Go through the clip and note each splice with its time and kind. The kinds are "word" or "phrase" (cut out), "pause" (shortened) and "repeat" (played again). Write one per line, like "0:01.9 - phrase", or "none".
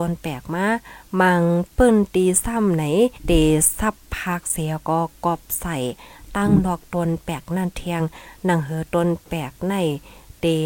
0:03.1 - pause